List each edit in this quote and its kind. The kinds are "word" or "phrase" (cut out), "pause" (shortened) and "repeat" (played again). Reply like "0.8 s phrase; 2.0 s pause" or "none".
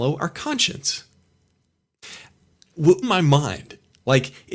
3.0 s phrase